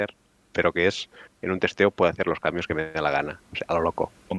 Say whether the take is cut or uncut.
uncut